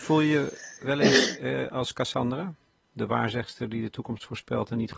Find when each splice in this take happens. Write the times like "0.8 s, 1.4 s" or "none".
none